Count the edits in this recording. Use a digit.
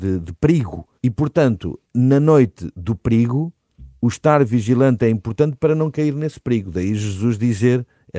2